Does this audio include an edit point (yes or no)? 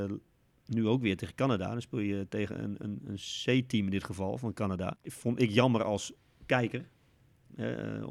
no